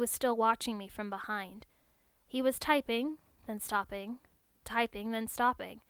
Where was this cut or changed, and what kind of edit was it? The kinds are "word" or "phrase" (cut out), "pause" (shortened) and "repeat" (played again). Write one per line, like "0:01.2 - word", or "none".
0:04.7 - word